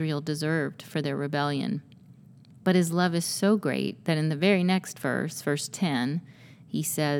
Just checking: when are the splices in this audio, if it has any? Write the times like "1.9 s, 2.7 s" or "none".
none